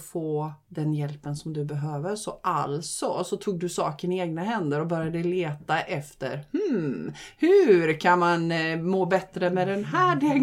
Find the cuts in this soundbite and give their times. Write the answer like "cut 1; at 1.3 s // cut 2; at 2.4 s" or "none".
none